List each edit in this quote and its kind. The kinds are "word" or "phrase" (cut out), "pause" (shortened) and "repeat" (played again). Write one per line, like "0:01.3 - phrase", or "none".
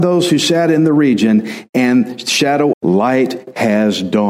0:02.7 - phrase